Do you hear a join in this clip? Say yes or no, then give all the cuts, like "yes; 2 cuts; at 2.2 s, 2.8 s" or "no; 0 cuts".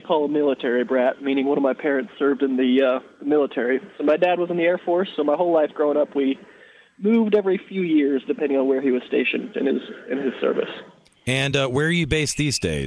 no; 0 cuts